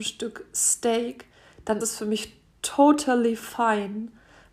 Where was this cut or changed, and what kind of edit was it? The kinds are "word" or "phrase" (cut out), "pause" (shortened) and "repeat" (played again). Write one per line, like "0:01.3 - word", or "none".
0:01.8 - word